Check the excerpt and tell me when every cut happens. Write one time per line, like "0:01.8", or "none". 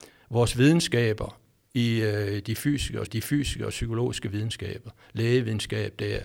0:03.1